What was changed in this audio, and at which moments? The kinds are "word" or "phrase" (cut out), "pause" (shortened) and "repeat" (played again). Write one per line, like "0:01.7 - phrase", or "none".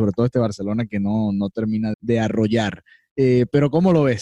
0:01.9 - word

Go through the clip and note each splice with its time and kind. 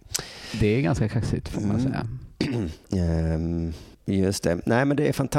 0:02.8 - pause
0:03.9 - pause

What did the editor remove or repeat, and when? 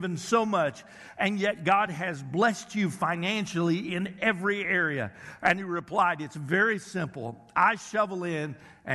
none

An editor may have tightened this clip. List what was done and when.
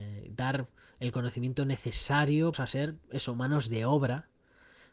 0:02.5 - phrase

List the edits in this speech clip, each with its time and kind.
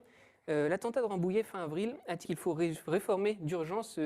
0:02.2 - word

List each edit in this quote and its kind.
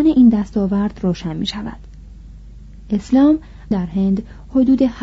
0:03.7 - word

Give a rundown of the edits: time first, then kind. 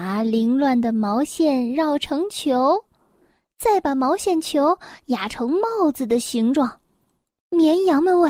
none

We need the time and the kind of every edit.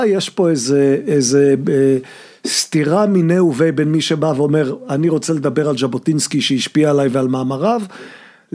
none

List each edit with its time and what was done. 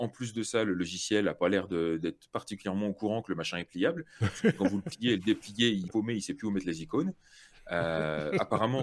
0:05.9 - phrase

